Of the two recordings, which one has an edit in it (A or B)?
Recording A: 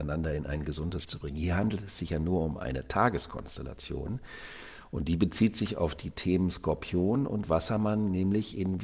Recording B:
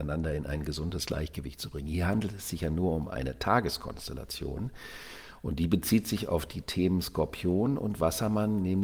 A